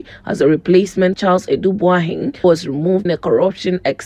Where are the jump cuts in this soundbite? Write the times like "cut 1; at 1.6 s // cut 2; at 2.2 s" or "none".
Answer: cut 1; at 1.1 s // cut 2; at 2.4 s // cut 3; at 3.1 s